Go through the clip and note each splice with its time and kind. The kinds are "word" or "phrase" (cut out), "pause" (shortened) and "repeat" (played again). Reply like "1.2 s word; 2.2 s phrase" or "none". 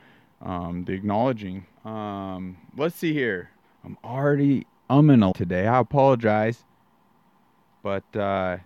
1.7 s pause; 3.6 s pause; 4.8 s pause; 5.3 s word